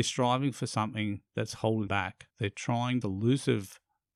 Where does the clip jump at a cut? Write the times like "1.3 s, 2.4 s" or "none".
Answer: 1.3 s, 1.9 s, 2.3 s, 3.0 s